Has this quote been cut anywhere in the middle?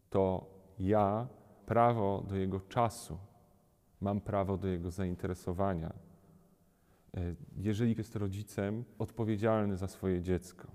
yes; 3 cuts; at 1.6 s, 8.0 s, 9.0 s

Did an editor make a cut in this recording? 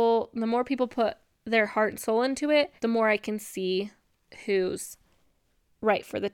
yes; 2 cuts; at 1.3 s, 2.8 s

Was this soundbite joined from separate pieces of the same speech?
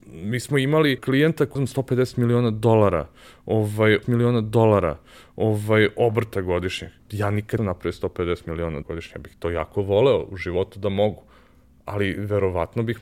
yes; 6 cuts; at 1.0 s, 1.6 s, 4.0 s, 7.0 s, 7.6 s, 8.8 s

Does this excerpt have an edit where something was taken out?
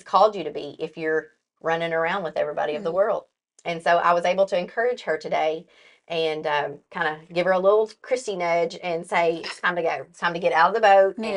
no; 0 cuts

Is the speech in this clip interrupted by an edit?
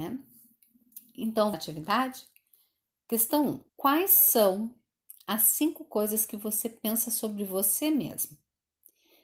yes; 2 cuts; at 1.5 s, 3.7 s

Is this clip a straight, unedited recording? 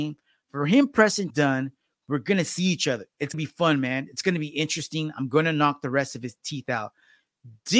no; 2 cuts; at 1.3 s, 3.3 s

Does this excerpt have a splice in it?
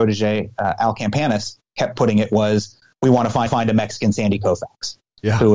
yes; 1 cut; at 3.5 s

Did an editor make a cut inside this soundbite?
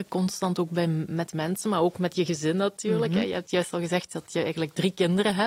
no; 0 cuts

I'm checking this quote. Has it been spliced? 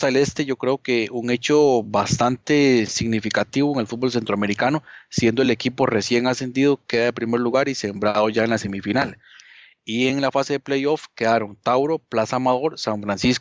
no; 0 cuts

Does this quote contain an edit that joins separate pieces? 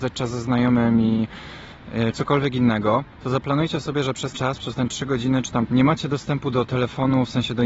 yes; 4 cuts; at 2.1 s, 3.1 s, 4.3 s, 5.7 s

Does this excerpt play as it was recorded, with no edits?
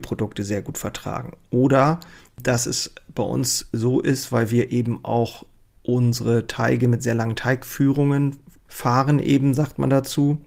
yes; 0 cuts

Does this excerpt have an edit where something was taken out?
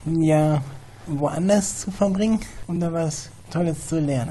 no; 0 cuts

